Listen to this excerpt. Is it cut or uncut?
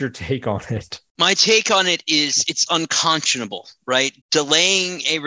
cut